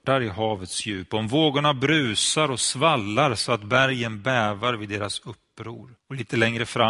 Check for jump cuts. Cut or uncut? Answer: cut